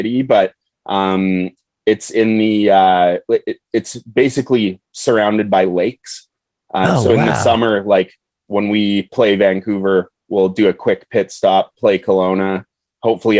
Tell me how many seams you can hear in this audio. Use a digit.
0